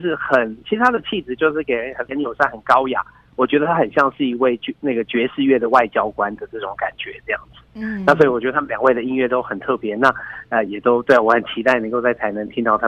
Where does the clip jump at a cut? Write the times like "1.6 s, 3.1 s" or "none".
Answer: 2.1 s